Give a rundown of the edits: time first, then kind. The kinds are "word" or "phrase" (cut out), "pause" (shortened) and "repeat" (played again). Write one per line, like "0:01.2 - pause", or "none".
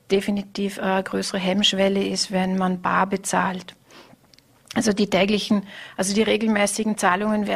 none

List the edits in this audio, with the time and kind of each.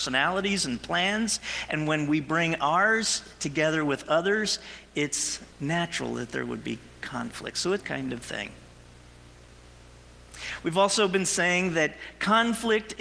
0:05.5 - pause
0:07.8 - phrase

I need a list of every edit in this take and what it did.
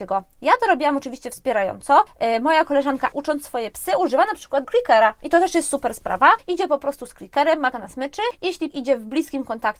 0:03.1 - word
0:04.6 - phrase
0:07.7 - word
0:08.7 - word

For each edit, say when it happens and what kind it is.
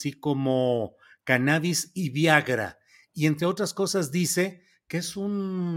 none

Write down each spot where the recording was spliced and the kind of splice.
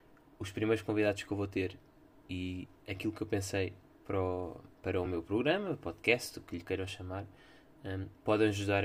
none

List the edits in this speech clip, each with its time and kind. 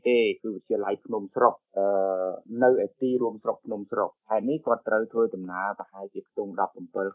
0:01.7 - pause
0:04.2 - pause

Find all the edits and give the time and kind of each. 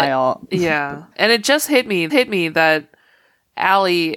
0:01.1 - word
0:02.1 - repeat

